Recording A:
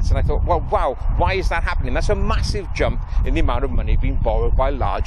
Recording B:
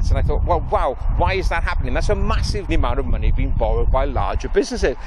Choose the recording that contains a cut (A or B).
B